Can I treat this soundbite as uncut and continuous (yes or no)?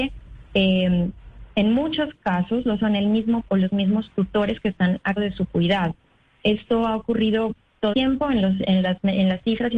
no